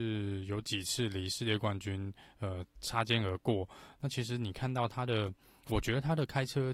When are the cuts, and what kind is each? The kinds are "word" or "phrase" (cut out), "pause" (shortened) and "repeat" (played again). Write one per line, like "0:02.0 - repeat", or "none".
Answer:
none